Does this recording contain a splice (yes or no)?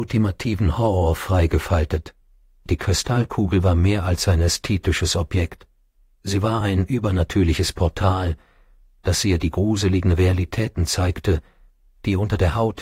no